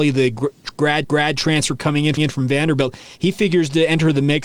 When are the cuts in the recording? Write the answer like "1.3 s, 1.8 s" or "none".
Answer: 1.0 s, 2.2 s